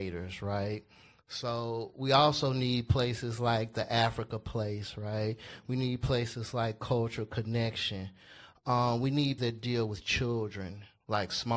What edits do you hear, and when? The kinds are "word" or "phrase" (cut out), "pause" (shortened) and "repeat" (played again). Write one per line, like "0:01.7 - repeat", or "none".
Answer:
0:09.4 - word